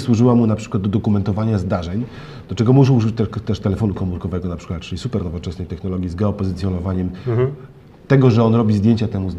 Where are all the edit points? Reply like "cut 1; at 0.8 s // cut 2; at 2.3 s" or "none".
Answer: none